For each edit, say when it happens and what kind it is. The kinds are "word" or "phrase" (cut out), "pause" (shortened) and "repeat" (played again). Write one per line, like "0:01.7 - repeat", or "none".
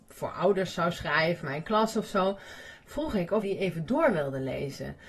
0:01.4 - word
0:03.4 - word